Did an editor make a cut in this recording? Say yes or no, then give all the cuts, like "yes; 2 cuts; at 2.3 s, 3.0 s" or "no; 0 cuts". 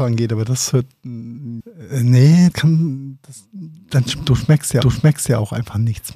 yes; 3 cuts; at 1.6 s, 2.5 s, 4.8 s